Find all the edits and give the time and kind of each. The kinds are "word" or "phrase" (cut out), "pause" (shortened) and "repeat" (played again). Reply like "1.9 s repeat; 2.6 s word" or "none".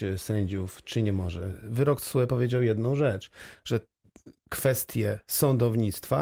none